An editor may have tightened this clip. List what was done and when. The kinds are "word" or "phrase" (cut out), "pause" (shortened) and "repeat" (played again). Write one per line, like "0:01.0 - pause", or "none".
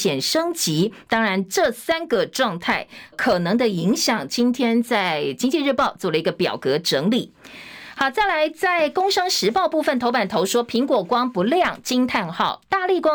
0:03.1 - word